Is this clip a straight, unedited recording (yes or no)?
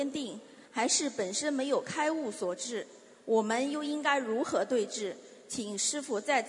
yes